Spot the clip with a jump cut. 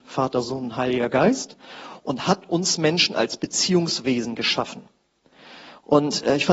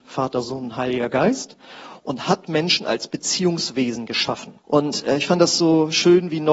second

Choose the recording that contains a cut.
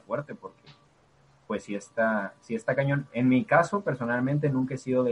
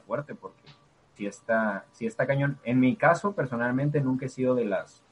second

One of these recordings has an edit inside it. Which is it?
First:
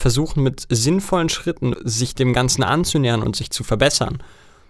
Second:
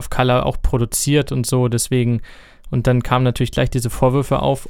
first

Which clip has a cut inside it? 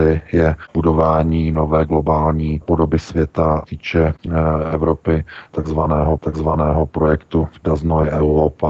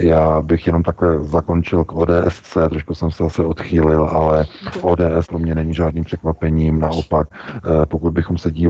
first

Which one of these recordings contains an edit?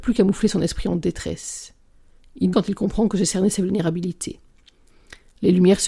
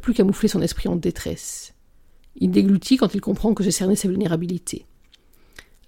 first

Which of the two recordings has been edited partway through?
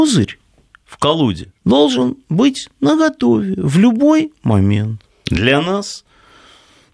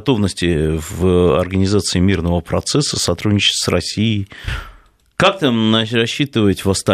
first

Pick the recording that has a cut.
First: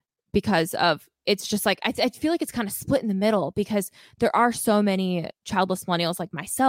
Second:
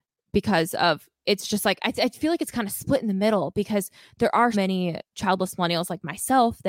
second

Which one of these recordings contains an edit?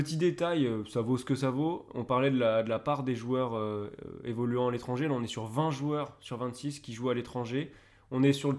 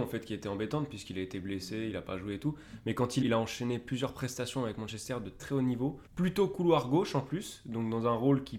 second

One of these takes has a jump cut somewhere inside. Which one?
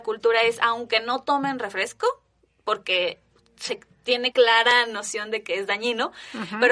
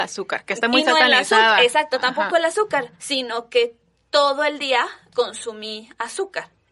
first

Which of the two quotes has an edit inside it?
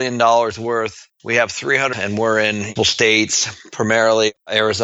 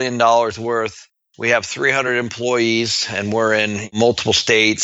first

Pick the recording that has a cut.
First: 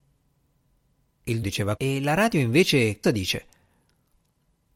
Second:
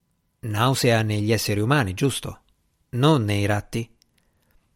first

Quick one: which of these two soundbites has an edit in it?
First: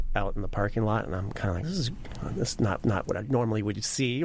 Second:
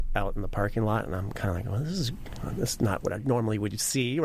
first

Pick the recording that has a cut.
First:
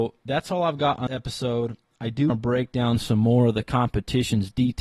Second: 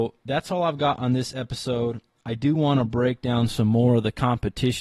first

